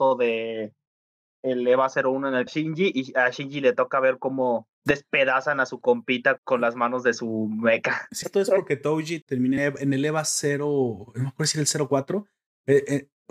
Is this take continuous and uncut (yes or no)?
no